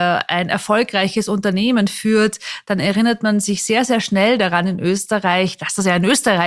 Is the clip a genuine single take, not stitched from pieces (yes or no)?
yes